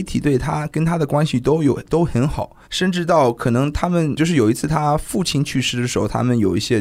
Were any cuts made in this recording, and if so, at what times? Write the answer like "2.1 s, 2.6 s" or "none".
2.6 s